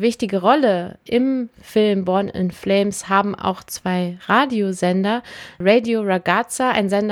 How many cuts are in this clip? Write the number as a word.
zero